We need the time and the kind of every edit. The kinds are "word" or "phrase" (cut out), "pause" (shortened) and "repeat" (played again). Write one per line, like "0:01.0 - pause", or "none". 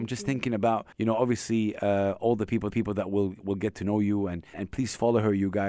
0:00.9 - pause
0:02.7 - repeat
0:04.5 - word